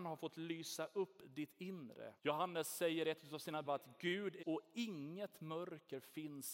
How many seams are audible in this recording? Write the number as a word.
three